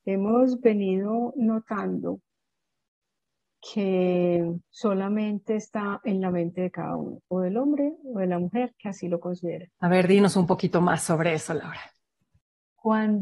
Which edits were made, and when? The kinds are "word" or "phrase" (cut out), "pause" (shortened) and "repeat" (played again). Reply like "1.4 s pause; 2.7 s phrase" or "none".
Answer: 4.6 s pause; 7.2 s pause; 9.7 s pause